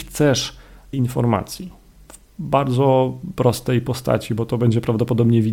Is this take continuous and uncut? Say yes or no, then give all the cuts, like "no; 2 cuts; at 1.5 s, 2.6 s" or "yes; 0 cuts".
no; 1 cut; at 0.9 s